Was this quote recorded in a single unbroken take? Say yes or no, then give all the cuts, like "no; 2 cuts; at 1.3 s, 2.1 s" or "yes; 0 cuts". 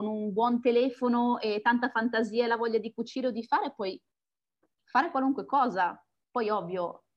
yes; 0 cuts